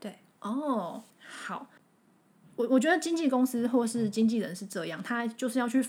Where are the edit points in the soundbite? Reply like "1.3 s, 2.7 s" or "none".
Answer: 1.1 s